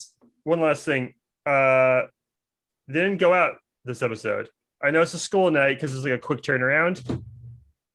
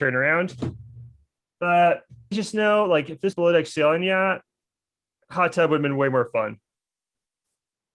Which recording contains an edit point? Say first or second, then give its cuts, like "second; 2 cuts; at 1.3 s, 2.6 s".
second; 3 cuts; at 2.3 s, 3.3 s, 5.2 s